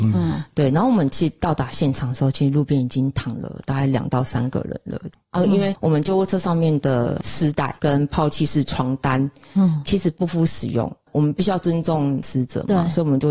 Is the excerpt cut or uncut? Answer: cut